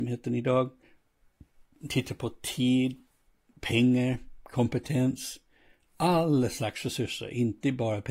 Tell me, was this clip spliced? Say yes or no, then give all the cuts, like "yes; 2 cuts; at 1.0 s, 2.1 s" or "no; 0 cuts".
no; 0 cuts